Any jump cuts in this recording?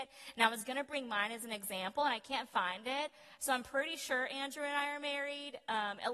no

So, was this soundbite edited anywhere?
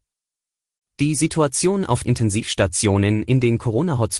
yes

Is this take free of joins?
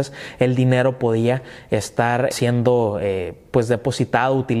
no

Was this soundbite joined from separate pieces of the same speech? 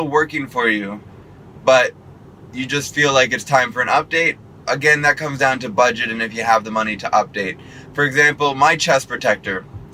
no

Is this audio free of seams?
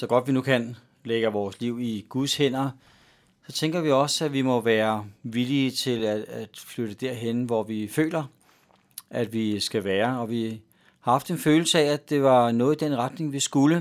yes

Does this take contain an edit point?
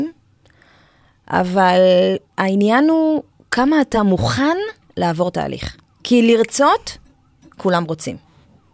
no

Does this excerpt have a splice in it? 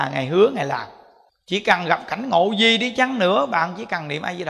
yes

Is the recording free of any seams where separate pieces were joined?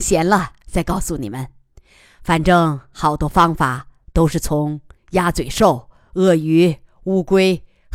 yes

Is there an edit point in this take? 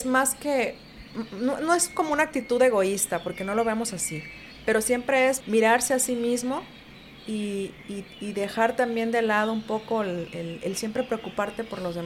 yes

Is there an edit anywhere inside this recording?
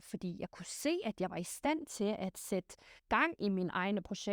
yes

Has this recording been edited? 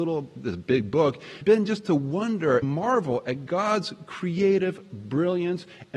yes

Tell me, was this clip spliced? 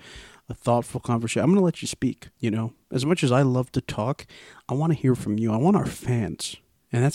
yes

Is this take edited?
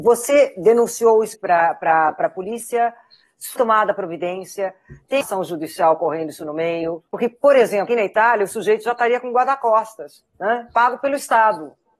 yes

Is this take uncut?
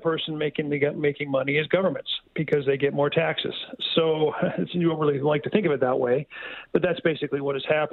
no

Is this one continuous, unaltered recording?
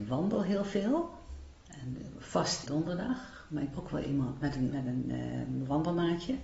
no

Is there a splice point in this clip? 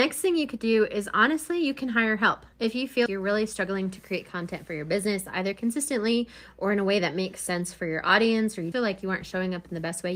yes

